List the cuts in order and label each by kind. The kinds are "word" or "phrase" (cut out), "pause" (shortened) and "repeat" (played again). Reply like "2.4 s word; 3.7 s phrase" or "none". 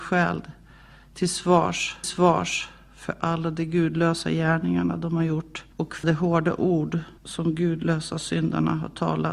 2.0 s repeat; 5.7 s pause; 6.0 s word; 7.2 s word